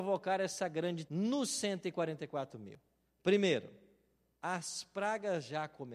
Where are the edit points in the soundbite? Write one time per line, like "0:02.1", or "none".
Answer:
0:01.1